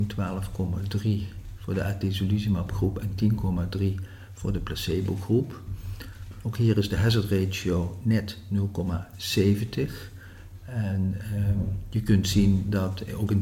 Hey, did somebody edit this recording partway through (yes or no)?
no